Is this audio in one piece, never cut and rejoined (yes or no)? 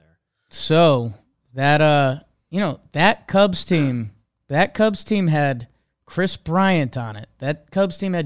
yes